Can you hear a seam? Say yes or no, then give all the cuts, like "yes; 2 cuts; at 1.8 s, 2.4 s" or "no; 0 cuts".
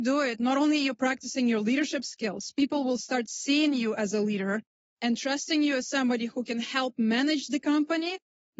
no; 0 cuts